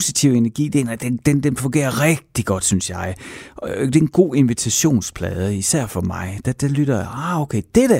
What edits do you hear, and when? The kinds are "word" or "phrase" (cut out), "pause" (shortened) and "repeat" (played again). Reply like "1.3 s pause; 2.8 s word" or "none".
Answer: none